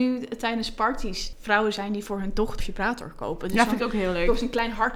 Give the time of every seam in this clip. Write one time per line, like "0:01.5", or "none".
0:01.3
0:02.6